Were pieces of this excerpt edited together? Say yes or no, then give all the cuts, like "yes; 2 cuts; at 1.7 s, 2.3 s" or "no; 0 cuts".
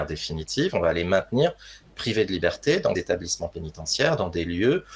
yes; 1 cut; at 3.0 s